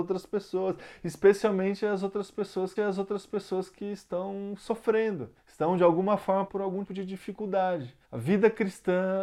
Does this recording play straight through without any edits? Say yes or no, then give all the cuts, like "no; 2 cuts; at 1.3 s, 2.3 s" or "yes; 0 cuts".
no; 5 cuts; at 2.8 s, 5.4 s, 6.5 s, 6.9 s, 8.0 s